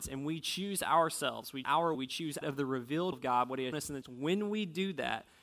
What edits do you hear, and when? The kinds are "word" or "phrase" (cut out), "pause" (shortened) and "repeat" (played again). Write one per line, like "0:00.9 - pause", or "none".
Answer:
0:01.6 - word
0:01.9 - word
0:02.4 - word
0:03.1 - word
0:03.7 - word
0:04.0 - word